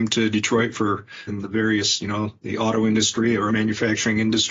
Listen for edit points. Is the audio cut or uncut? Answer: cut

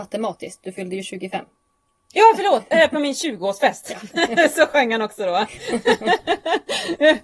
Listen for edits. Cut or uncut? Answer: uncut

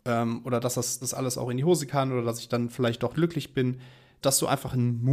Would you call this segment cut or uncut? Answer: cut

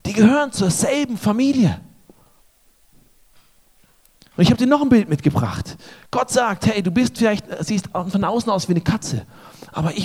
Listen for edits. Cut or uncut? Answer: uncut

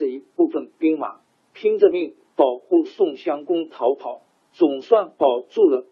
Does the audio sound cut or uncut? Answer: uncut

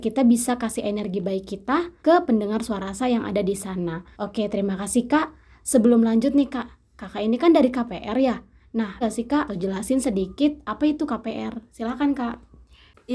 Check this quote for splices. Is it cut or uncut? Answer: cut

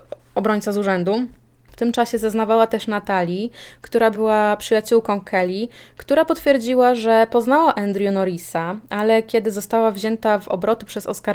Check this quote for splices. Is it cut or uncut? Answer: uncut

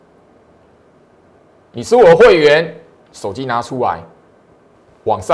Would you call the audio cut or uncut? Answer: uncut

